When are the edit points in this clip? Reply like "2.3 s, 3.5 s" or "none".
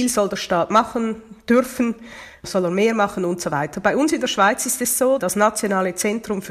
5.2 s